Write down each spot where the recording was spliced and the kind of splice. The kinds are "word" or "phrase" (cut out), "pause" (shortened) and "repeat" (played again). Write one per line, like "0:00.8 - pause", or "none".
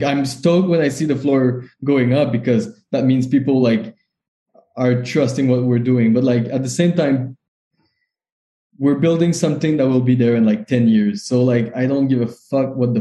none